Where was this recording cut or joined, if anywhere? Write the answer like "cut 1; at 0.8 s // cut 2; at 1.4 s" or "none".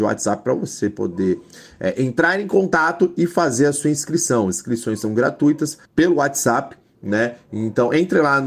cut 1; at 5.8 s